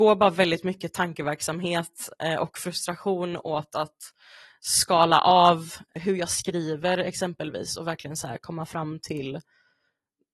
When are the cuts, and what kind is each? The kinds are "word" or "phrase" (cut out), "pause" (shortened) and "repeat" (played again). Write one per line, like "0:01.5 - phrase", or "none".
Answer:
none